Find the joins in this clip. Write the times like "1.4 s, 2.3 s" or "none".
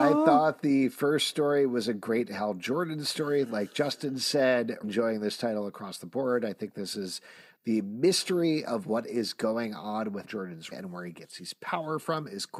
4.8 s, 10.2 s, 10.7 s